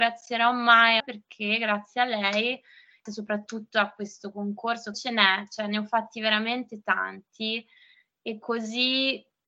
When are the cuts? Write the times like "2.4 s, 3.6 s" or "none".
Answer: 1.0 s, 3.1 s, 4.9 s

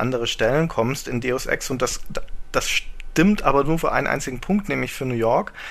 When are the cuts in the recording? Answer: none

